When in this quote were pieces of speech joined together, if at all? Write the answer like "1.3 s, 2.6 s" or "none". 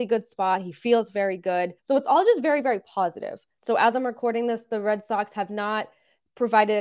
1.8 s

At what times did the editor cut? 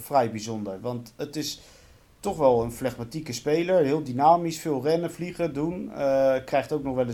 none

